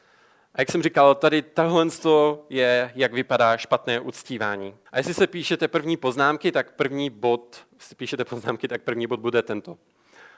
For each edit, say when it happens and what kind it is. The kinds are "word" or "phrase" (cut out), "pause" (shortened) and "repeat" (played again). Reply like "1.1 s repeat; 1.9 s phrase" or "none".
4.9 s pause; 7.7 s pause